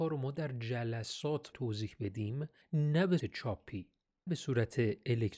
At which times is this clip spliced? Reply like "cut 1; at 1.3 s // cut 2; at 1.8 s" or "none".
cut 1; at 1.5 s // cut 2; at 2.6 s // cut 3; at 3.2 s // cut 4; at 4.3 s